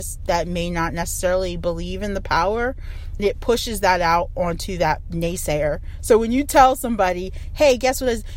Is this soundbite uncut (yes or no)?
no